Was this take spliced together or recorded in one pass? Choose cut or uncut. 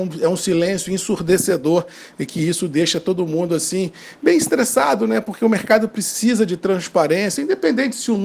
uncut